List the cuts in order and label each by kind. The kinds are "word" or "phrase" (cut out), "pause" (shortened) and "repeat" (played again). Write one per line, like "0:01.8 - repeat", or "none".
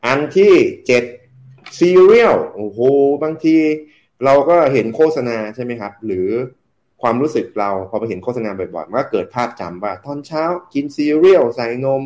none